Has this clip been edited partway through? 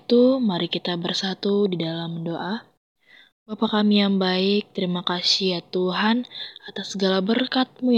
no; 0 cuts

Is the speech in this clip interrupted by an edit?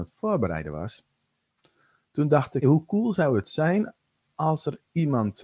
yes; 1 cut; at 2.6 s

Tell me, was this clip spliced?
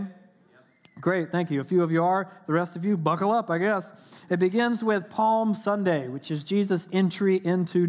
no; 0 cuts

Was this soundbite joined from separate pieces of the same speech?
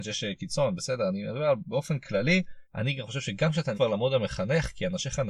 yes; 2 cuts; at 2.6 s, 3.7 s

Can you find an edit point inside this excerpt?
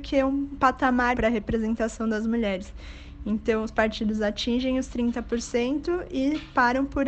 yes; 1 cut; at 1.1 s

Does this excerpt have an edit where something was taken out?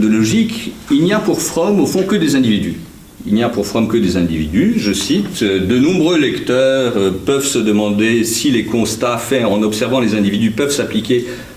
no; 0 cuts

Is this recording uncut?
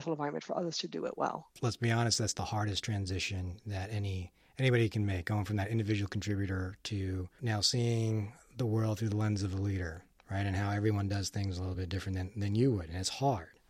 yes; 0 cuts

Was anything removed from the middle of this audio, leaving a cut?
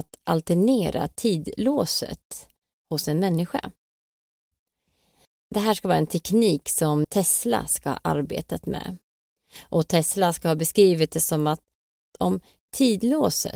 yes; 1 cut; at 7.0 s

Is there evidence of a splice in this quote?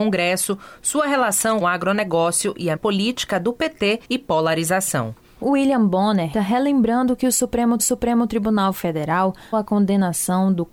yes; 7 cuts; at 1.6 s, 2.8 s, 4.0 s, 5.4 s, 6.3 s, 7.8 s, 9.5 s

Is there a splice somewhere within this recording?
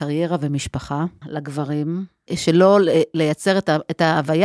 yes; 2 cuts; at 1.2 s, 2.3 s

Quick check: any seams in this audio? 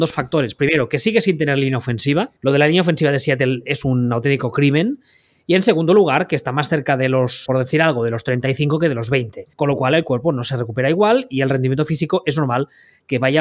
yes; 3 cuts; at 2.4 s, 7.5 s, 9.5 s

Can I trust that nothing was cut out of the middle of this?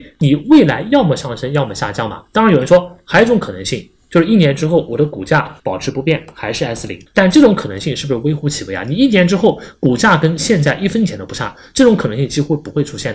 no; 2 cuts; at 5.6 s, 7.1 s

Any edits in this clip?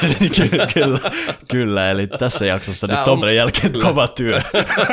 yes; 2 cuts; at 3.2 s, 3.7 s

